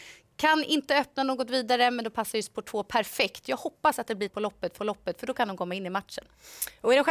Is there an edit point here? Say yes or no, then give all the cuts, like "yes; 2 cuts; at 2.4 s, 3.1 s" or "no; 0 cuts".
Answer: yes; 2 cuts; at 4.3 s, 4.8 s